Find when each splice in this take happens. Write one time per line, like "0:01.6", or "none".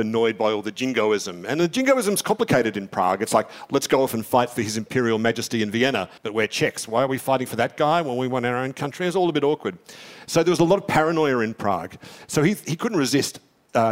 0:06.2

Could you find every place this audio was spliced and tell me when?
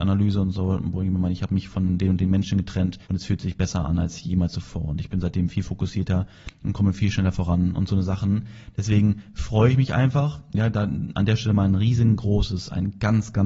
0:03.0

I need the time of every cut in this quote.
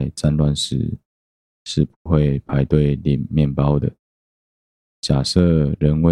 none

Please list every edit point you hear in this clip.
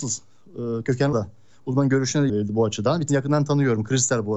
0:01.1
0:02.3
0:03.1

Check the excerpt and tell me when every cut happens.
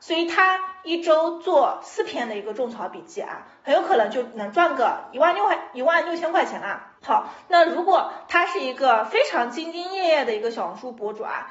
0:07.0

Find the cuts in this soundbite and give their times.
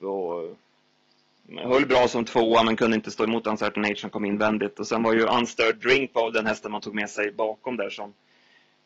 none

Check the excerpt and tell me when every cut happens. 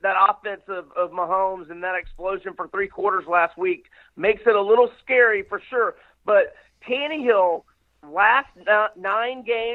none

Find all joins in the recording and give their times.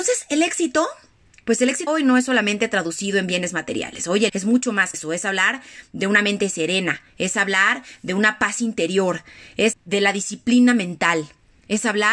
0:01.9
0:04.3
0:04.9
0:09.7

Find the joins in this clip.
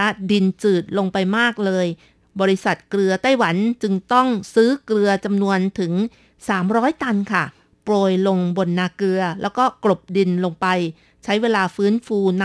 none

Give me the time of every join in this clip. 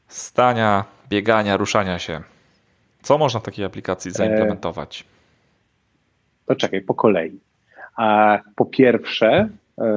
none

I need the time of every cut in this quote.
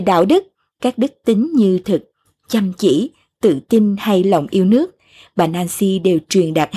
0:01.8

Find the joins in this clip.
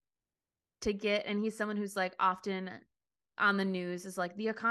none

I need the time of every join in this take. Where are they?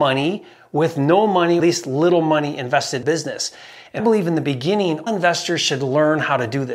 0:01.6
0:03.0
0:04.0
0:05.1

